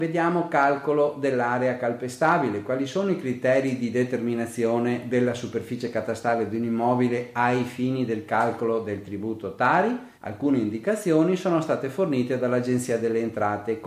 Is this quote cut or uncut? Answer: cut